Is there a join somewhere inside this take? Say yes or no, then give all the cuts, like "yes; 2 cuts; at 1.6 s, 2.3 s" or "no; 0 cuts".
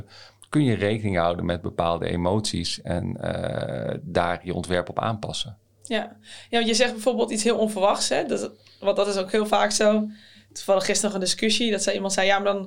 no; 0 cuts